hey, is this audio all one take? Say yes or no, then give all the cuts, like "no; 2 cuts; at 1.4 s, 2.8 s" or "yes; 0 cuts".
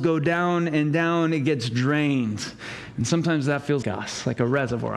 no; 1 cut; at 3.8 s